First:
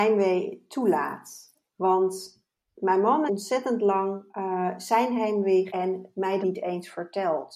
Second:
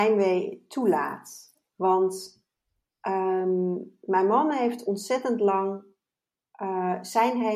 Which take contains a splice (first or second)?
first